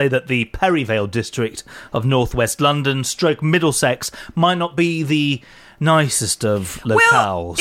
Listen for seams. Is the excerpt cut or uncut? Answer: uncut